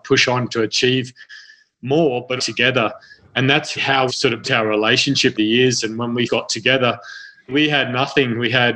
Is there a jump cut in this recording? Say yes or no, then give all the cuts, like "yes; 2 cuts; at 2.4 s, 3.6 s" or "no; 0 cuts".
yes; 7 cuts; at 2.4 s, 3.8 s, 4.1 s, 4.4 s, 5.3 s, 6.3 s, 7.5 s